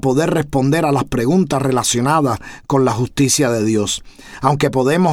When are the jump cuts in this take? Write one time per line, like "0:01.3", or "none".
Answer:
none